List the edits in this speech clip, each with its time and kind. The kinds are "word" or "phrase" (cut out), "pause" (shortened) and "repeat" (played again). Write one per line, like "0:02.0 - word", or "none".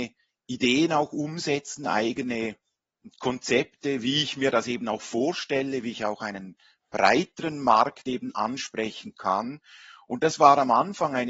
none